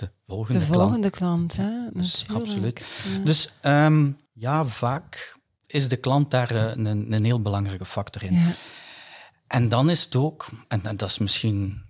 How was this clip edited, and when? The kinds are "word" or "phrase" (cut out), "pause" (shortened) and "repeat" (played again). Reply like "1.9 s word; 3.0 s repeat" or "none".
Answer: 4.3 s pause